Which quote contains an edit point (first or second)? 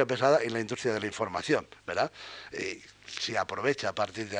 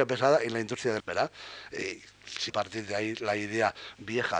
second